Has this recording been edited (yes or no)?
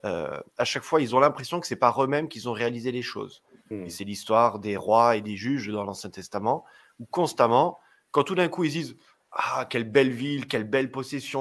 no